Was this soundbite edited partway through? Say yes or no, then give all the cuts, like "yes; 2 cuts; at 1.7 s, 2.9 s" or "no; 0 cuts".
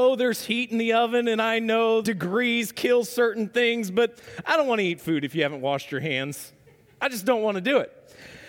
yes; 1 cut; at 2.0 s